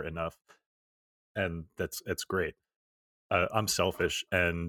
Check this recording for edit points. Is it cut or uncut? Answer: cut